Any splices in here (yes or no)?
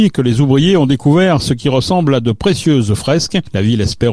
no